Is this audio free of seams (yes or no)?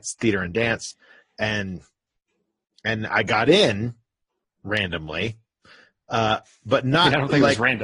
yes